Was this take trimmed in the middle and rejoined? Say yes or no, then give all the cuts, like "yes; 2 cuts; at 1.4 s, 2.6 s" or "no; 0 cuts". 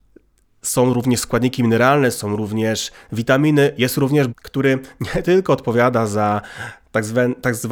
yes; 1 cut; at 4.3 s